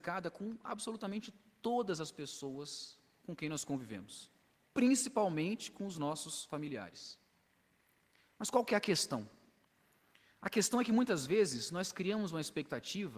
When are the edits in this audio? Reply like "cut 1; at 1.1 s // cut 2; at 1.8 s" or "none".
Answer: none